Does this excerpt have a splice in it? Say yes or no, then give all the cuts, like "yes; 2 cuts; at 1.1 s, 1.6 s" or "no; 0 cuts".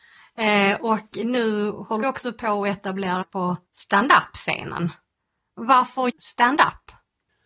yes; 4 cuts; at 2.0 s, 3.2 s, 3.7 s, 6.1 s